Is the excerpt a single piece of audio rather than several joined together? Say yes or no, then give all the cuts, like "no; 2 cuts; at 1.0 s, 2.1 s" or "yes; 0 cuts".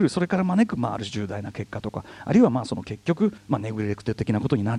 no; 1 cut; at 3.4 s